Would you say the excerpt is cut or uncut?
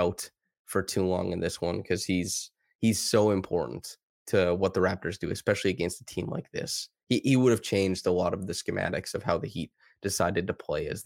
uncut